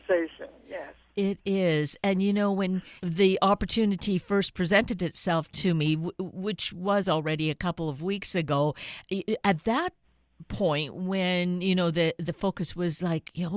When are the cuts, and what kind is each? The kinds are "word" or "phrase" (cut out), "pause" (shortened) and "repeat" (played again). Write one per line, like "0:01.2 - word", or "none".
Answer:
0:03.0 - pause